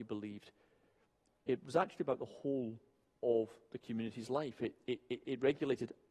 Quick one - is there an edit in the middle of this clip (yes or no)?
no